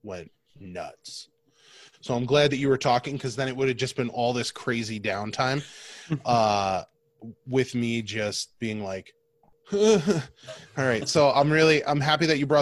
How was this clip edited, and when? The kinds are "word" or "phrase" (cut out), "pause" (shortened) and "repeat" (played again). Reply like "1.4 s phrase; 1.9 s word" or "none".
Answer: none